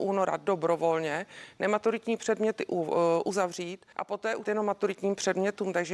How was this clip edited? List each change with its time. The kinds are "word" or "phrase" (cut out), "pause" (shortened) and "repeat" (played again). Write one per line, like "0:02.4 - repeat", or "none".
0:03.9 - pause
0:04.4 - phrase